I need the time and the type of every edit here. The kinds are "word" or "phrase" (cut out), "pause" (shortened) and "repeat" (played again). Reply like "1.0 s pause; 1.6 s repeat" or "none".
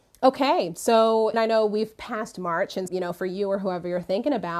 1.3 s word; 2.9 s word